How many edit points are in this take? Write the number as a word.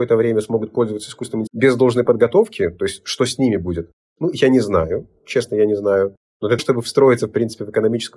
two